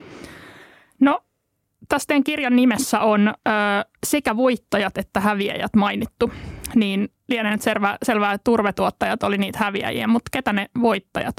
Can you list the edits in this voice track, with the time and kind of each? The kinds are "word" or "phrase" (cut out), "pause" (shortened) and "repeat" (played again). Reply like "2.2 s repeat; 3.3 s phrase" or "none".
3.4 s pause; 4.0 s pause

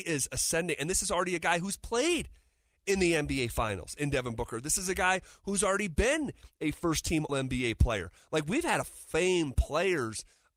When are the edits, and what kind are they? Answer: 7.3 s word; 8.8 s word

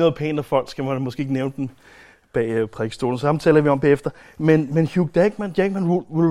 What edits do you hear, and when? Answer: none

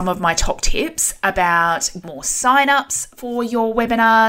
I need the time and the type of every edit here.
2.0 s word

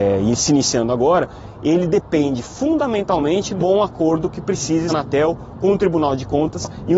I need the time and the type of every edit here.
3.6 s word; 4.9 s phrase

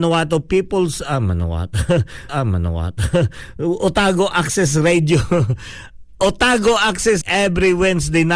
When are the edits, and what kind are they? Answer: 2.3 s repeat; 7.2 s word

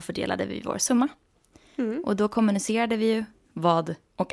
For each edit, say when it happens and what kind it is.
none

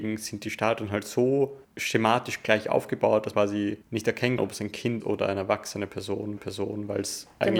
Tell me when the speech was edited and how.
1.6 s pause; 3.3 s word; 3.8 s pause; 4.4 s word; 5.0 s word; 6.4 s repeat

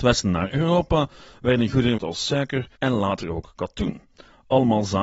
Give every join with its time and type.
2.0 s word; 2.8 s word

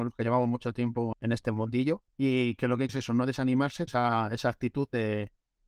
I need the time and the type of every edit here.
1.1 s word; 2.1 s pause; 2.9 s phrase; 3.9 s word

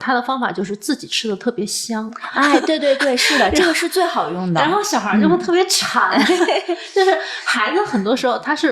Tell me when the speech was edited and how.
none

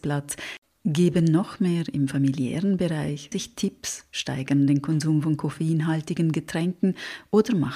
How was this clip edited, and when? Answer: 3.3 s word

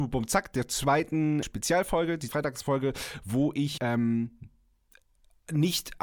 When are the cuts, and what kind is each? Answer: 1.4 s word; 2.3 s word; 3.8 s word

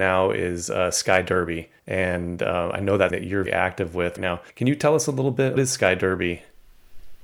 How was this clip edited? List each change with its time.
1.8 s pause; 3.1 s word; 3.5 s word; 4.2 s word; 4.5 s pause; 5.6 s phrase

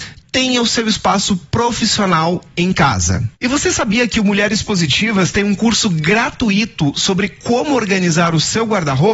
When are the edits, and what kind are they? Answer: 3.3 s pause

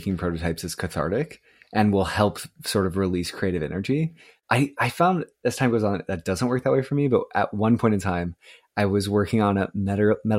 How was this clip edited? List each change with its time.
none

